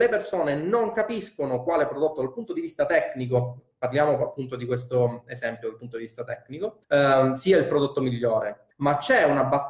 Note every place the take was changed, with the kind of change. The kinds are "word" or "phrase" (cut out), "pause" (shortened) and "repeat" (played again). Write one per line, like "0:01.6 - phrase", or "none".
0:06.8 - pause
0:08.7 - pause